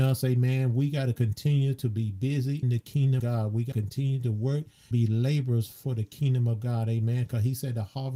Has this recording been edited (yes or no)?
yes